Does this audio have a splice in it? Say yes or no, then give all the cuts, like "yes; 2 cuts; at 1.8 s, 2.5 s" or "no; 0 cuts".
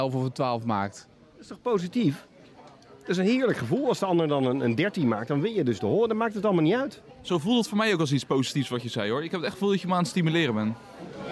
no; 0 cuts